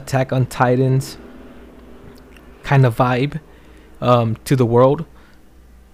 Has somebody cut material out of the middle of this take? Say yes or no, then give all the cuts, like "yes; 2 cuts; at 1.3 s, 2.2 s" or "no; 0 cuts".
no; 0 cuts